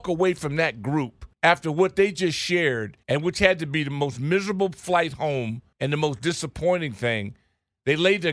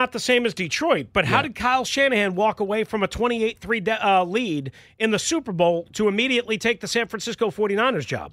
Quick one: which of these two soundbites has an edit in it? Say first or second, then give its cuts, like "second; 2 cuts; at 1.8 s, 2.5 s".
first; 3 cuts; at 1.3 s, 3.0 s, 5.7 s